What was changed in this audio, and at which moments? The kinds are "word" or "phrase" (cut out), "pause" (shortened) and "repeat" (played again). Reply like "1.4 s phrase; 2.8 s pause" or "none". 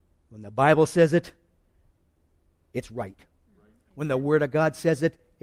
none